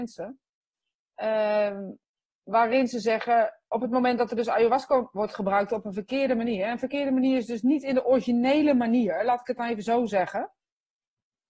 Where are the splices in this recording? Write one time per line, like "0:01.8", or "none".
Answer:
none